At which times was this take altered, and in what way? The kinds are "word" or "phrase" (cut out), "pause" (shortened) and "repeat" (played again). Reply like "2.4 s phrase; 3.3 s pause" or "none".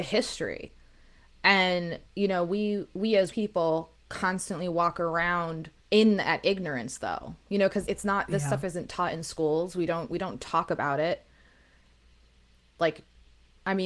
2.1 s pause; 3.3 s word; 5.8 s pause; 7.9 s word